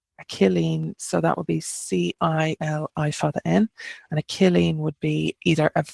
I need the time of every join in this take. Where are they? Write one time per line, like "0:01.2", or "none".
none